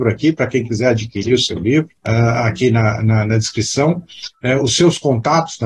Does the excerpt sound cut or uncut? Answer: cut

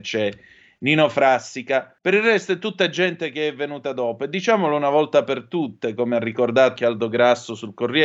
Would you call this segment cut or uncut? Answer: cut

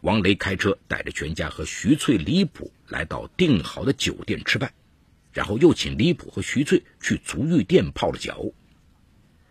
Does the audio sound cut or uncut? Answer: uncut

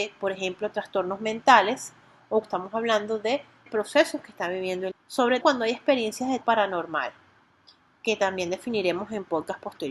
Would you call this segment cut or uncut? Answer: cut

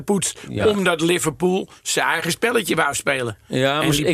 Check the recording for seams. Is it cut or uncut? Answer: uncut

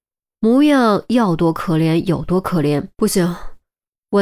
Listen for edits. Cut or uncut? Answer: cut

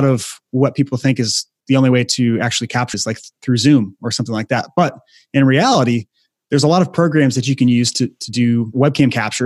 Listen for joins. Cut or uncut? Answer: cut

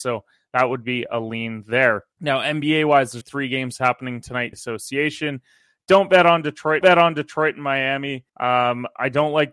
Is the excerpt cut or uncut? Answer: cut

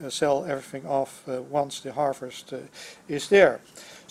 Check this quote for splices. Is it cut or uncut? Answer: uncut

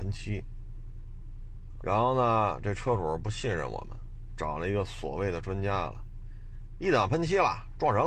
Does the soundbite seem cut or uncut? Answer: cut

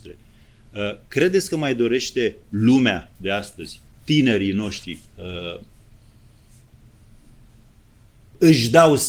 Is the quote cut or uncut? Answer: cut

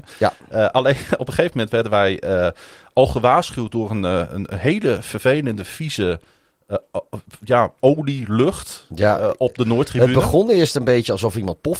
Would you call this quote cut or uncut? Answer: uncut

